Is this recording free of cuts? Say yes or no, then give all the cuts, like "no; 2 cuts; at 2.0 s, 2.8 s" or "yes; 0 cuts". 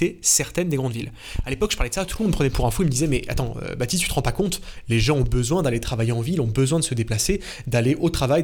yes; 0 cuts